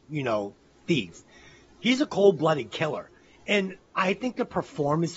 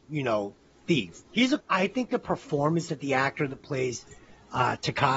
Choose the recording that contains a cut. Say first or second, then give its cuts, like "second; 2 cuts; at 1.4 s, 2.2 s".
second; 2 cuts; at 1.3 s, 1.6 s